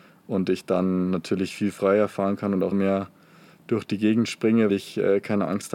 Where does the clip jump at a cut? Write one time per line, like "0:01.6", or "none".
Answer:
0:02.7
0:04.7